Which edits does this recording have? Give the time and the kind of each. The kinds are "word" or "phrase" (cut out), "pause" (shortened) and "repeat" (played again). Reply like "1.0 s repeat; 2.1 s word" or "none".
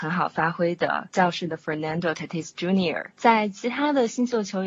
none